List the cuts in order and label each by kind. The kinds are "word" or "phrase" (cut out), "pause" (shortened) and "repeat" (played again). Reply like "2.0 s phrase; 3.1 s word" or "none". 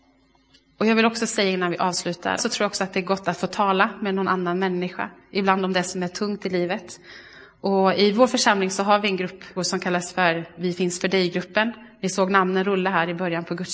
2.4 s phrase; 9.6 s word